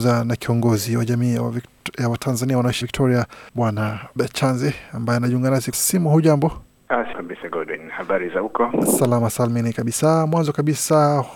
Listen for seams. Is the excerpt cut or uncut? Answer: cut